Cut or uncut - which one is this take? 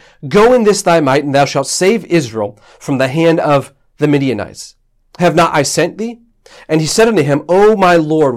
uncut